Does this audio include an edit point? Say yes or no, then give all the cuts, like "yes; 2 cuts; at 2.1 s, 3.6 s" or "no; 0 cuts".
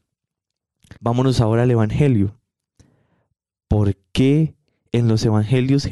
yes; 1 cut; at 1.0 s